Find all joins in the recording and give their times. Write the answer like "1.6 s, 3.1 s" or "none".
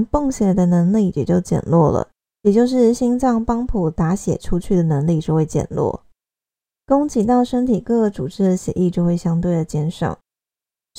2.1 s